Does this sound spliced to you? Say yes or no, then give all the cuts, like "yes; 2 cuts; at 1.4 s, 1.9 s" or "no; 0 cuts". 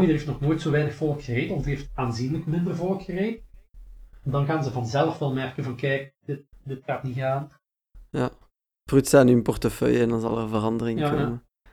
no; 0 cuts